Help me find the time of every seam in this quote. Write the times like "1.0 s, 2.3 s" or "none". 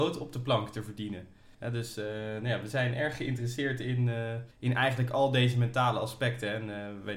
1.5 s, 4.5 s